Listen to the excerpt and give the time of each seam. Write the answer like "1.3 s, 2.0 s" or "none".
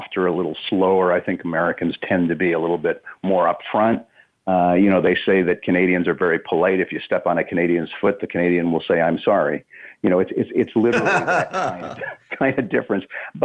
none